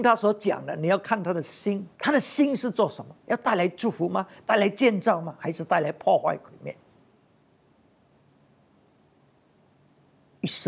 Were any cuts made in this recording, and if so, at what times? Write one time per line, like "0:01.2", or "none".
0:02.0
0:03.2